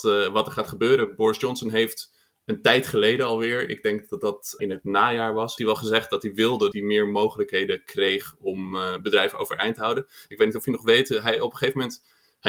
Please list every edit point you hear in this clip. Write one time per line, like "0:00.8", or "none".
0:04.6
0:05.6
0:06.7